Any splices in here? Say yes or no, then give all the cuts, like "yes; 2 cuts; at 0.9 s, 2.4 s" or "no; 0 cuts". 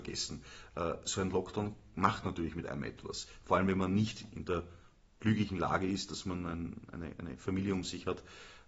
no; 0 cuts